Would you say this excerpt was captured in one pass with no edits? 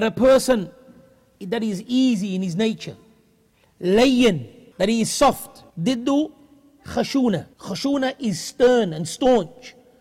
no; 3 cuts; at 4.7 s, 5.7 s, 7.5 s

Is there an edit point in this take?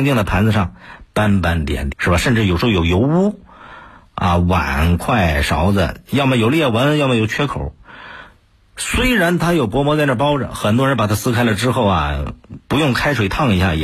yes; 1 cut; at 1.9 s

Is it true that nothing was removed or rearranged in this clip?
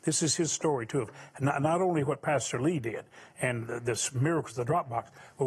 yes; 0 cuts

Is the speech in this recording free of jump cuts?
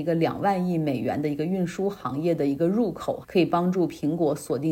no; 1 cut; at 3.2 s

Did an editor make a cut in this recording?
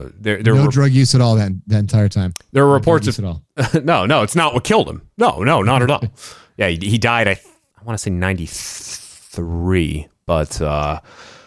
no; 0 cuts

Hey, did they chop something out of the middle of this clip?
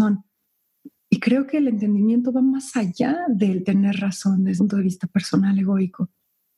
yes; 1 cut; at 4.6 s

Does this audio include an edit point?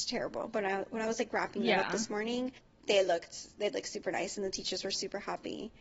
yes; 1 cut; at 2.6 s

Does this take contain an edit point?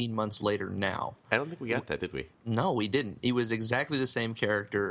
yes; 1 cut; at 2.3 s

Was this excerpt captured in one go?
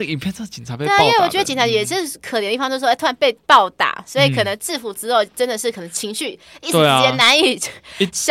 yes; 0 cuts

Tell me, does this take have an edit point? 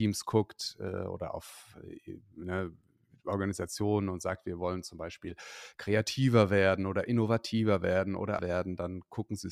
yes; 1 cut; at 8.4 s

